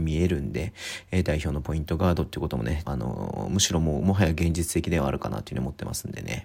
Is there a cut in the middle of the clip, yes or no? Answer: yes